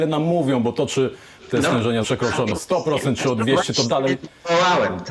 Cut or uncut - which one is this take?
cut